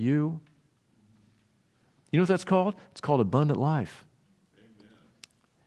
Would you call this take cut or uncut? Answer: uncut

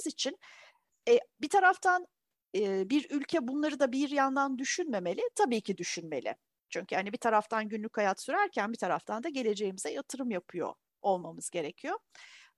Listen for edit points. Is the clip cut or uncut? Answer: uncut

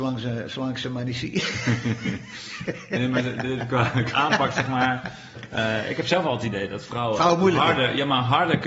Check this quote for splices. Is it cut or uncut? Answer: cut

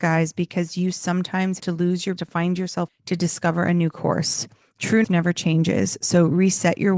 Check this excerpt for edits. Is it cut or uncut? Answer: cut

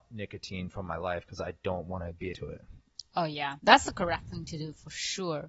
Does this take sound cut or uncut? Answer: cut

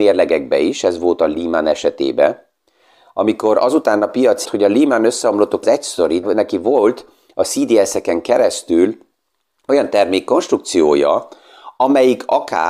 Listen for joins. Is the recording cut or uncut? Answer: cut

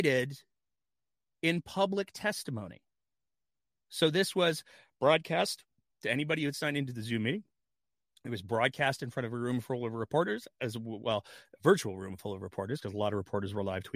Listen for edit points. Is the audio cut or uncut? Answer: uncut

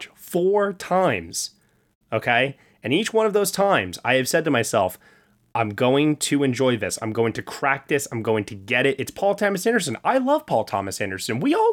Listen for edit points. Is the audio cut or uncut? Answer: uncut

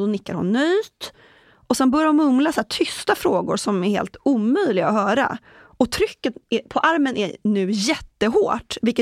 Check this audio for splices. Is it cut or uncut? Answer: uncut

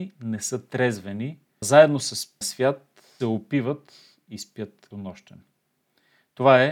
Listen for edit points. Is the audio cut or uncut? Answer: cut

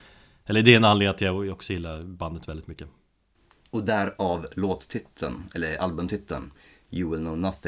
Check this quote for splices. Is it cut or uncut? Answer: uncut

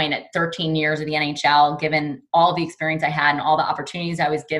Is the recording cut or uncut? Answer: uncut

